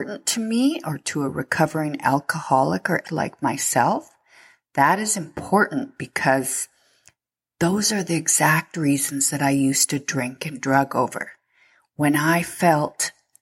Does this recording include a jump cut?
yes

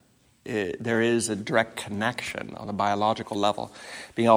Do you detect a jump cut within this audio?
no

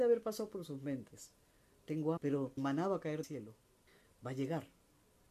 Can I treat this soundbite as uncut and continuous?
no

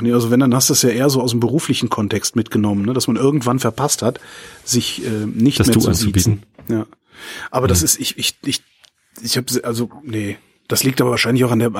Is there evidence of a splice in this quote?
no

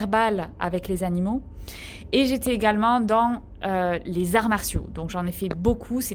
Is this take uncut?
yes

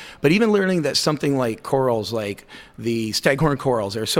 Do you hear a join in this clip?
no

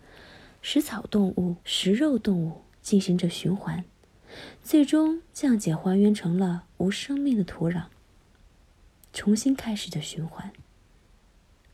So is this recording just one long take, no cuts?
no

